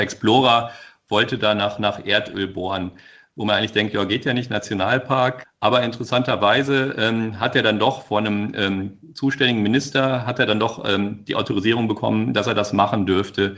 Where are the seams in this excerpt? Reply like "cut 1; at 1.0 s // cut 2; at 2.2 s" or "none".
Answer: none